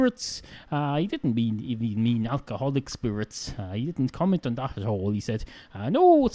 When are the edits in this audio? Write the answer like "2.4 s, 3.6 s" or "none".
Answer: none

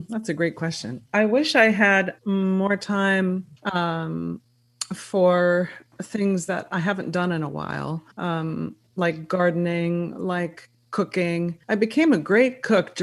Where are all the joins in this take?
2.2 s, 3.6 s, 8.1 s, 11.6 s

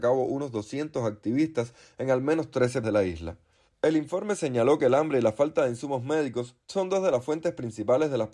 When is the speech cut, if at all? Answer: 2.8 s

